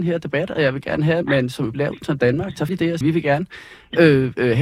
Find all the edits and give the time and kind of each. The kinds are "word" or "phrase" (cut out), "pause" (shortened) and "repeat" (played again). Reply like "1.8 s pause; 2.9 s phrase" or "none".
1.2 s word; 1.7 s word; 2.7 s word; 3.0 s word